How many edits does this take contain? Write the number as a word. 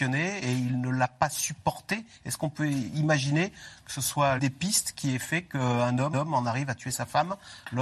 two